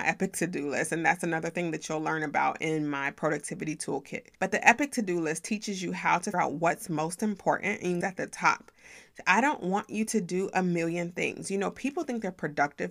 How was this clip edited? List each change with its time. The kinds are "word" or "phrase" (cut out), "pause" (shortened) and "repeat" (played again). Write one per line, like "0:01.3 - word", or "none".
0:04.3 - pause
0:06.3 - word
0:08.0 - phrase